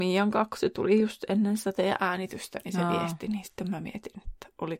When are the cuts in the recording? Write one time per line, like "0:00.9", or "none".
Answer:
none